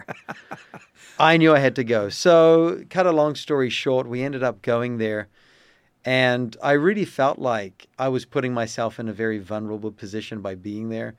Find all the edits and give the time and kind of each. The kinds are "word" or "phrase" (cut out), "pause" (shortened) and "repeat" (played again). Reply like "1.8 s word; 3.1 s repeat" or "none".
none